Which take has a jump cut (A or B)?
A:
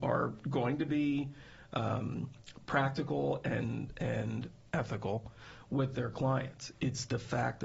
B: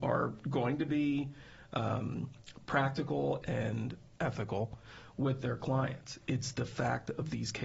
B